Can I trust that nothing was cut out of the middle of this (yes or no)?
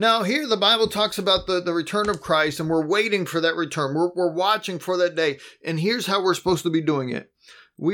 yes